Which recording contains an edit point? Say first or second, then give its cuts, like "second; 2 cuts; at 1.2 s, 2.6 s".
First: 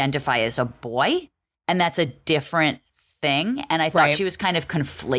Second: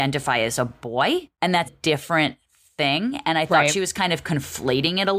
second; 2 cuts; at 1.3 s, 1.6 s